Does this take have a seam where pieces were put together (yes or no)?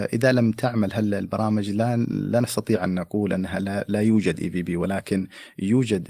no